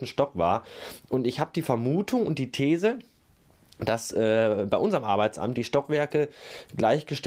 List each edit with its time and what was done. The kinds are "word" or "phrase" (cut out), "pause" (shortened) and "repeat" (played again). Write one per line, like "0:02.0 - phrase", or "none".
none